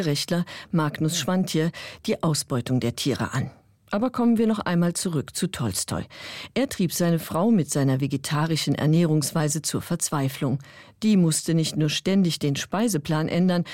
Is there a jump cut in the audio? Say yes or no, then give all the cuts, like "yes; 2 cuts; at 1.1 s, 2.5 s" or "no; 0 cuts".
no; 0 cuts